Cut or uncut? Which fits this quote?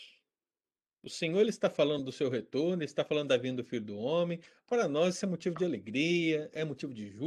uncut